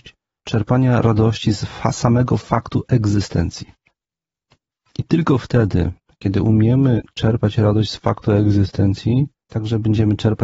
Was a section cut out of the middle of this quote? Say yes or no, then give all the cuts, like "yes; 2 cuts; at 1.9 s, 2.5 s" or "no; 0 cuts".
no; 0 cuts